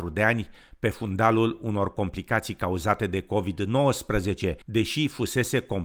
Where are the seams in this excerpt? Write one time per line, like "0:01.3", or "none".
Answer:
0:04.6